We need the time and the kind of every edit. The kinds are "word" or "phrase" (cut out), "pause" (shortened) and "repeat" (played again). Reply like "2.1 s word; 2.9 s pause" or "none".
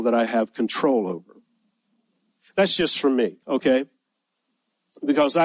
3.4 s pause